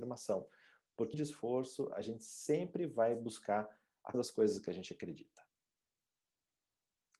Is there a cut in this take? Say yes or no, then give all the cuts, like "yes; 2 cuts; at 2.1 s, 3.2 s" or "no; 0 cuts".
yes; 2 cuts; at 1.1 s, 4.1 s